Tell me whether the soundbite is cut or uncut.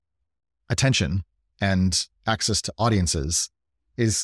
uncut